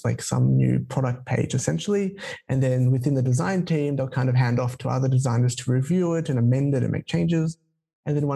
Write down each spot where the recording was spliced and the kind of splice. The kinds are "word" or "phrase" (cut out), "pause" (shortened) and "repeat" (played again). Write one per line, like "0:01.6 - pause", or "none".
none